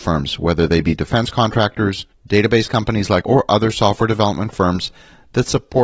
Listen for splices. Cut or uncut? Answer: cut